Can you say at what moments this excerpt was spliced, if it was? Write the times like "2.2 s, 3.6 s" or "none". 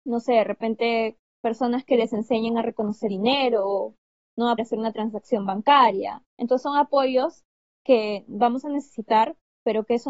1.2 s, 3.1 s, 4.6 s, 6.3 s